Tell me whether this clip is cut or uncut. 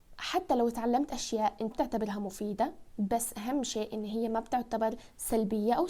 cut